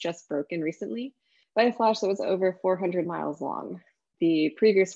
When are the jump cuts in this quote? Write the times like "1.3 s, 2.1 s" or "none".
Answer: none